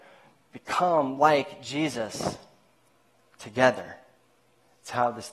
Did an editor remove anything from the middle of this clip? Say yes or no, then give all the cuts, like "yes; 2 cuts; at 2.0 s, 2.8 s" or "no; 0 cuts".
no; 0 cuts